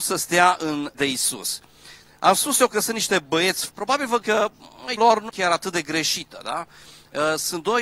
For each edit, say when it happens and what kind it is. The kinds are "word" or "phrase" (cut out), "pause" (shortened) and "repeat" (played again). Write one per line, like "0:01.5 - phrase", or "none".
0:00.9 - word
0:03.7 - word
0:04.2 - word
0:05.0 - word
0:05.3 - word